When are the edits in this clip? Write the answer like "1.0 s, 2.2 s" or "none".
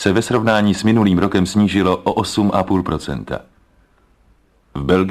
none